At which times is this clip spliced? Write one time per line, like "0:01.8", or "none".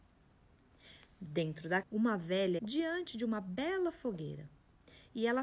0:01.8
0:02.6